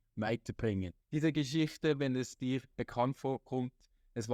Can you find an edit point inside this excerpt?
yes; 1 cut; at 1.0 s

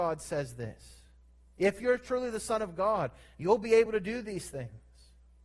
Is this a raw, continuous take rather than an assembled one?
yes; 0 cuts

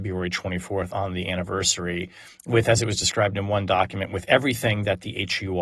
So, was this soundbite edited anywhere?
no; 0 cuts

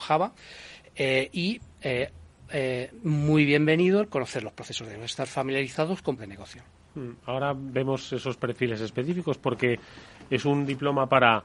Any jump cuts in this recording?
yes; 1 cut; at 6.2 s

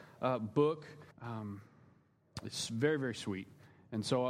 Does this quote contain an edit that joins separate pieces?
yes; 1 cut; at 1.1 s

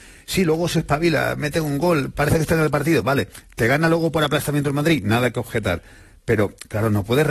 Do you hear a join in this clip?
no; 0 cuts

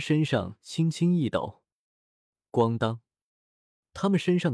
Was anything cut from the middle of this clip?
no; 0 cuts

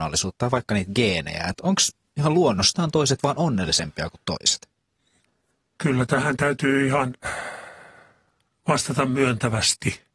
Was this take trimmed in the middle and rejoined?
no; 0 cuts

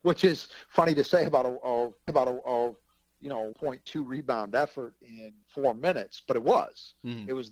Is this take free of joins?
no; 3 cuts; at 2.1 s, 3.5 s, 5.4 s

